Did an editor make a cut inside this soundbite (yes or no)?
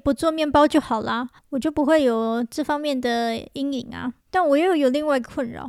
yes